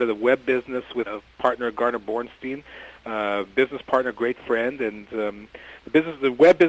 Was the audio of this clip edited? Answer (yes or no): yes